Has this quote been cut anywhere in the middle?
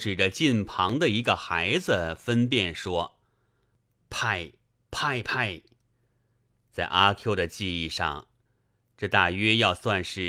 no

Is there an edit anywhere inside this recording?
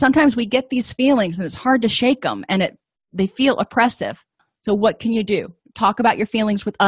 no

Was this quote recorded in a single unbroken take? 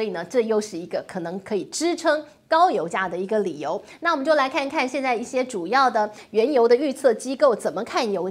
yes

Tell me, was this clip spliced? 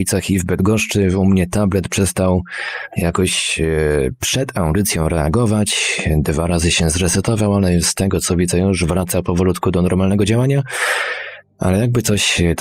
no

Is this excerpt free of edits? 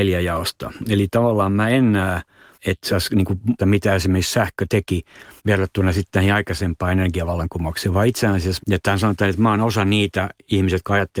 no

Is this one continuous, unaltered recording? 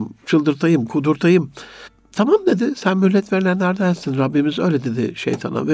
yes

